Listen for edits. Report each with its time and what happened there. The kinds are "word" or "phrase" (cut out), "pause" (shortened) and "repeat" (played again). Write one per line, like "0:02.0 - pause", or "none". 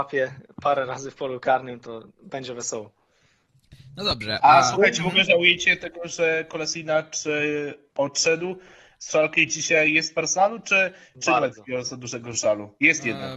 0:02.1 - pause